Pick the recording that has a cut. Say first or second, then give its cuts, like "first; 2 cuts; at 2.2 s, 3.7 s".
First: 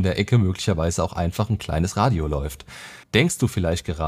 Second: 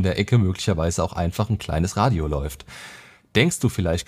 first; 1 cut; at 3.0 s